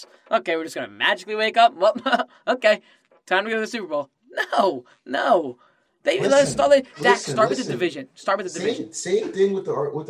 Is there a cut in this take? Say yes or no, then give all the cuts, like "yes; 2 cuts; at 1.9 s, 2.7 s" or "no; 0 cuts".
no; 0 cuts